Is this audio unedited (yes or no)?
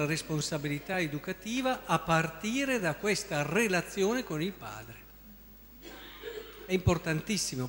yes